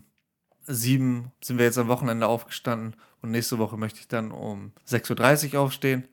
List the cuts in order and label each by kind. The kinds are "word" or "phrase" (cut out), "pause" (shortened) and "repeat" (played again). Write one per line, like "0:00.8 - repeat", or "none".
0:01.4 - pause